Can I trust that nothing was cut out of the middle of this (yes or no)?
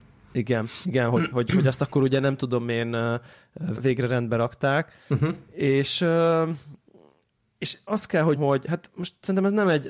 no